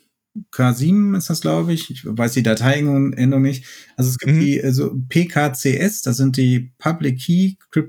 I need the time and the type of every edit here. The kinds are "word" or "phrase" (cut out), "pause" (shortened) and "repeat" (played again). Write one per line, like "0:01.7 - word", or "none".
none